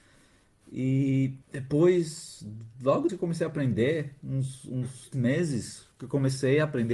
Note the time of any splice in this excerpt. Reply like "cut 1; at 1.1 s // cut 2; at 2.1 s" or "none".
cut 1; at 1.4 s // cut 2; at 3.1 s // cut 3; at 5.1 s // cut 4; at 5.9 s